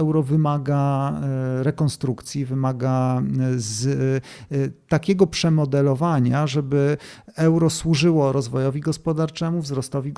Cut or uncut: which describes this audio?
uncut